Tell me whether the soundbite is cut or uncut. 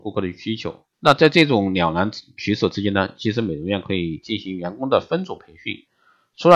cut